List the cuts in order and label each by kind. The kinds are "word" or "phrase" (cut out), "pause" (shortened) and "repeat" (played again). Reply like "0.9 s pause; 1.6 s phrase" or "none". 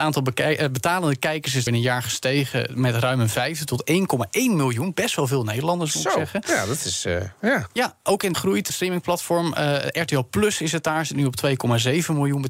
1.7 s word; 8.3 s word; 8.7 s word